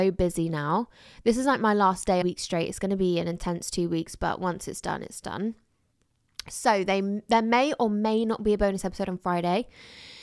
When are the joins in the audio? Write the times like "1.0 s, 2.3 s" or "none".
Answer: 2.2 s